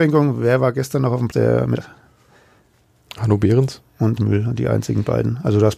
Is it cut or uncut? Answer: cut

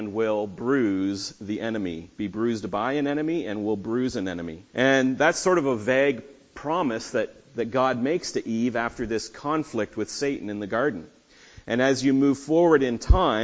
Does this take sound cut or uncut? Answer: cut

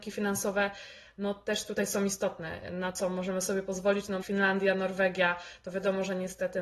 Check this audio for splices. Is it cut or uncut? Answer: cut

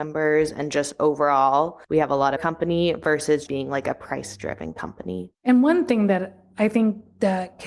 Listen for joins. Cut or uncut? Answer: cut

